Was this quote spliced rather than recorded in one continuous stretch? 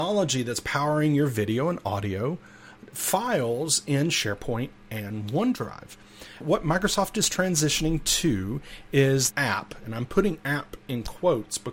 yes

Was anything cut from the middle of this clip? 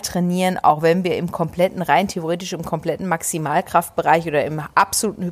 no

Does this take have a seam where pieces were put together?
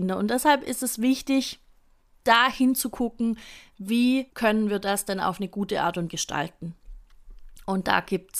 yes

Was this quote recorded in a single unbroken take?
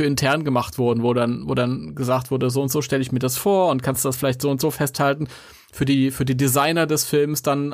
yes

